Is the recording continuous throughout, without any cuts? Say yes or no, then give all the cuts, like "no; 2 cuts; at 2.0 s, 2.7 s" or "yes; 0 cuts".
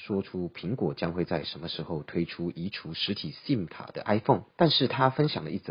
no; 1 cut; at 4.5 s